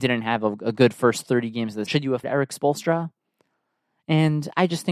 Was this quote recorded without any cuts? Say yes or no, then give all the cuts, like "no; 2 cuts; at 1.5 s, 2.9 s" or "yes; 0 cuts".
no; 2 cuts; at 1.9 s, 2.2 s